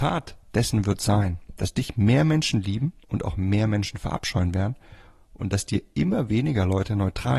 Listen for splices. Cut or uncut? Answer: cut